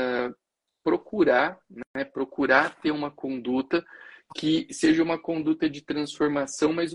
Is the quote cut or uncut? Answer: uncut